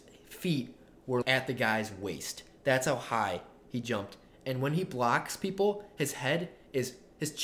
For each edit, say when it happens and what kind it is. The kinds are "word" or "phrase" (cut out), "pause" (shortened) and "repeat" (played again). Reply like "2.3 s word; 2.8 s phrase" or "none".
1.2 s word